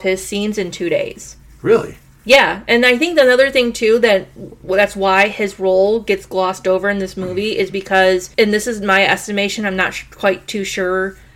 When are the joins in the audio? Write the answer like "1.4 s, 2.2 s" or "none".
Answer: none